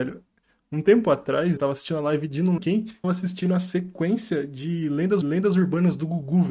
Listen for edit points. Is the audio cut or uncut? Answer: cut